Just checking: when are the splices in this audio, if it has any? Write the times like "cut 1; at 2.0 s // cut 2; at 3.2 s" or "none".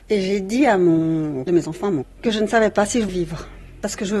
cut 1; at 1.5 s // cut 2; at 2.0 s // cut 3; at 3.1 s